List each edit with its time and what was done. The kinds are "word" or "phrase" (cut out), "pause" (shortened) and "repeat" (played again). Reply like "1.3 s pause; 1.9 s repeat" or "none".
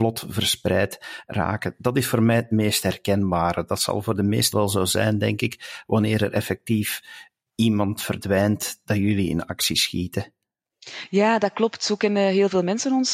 4.5 s word

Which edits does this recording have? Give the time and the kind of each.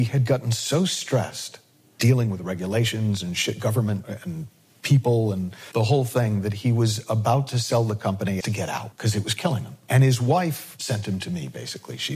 8.4 s phrase; 8.9 s pause

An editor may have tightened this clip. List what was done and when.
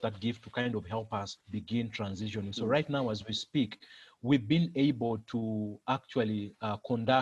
1.4 s pause

